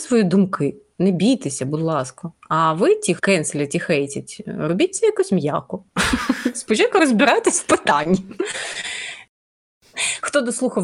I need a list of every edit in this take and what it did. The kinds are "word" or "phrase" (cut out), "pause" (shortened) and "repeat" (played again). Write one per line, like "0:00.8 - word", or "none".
0:03.2 - word